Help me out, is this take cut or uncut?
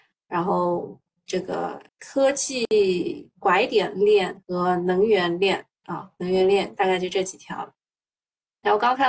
cut